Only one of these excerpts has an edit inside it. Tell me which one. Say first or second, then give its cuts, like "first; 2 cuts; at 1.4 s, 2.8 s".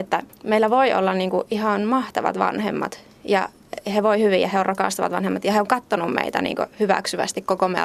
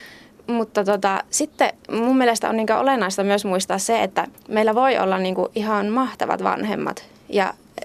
second; 1 cut; at 1.8 s